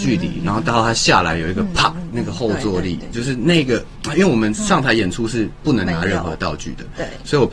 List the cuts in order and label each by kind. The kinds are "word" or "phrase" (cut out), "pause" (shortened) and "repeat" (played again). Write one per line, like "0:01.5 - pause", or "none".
0:03.1 - word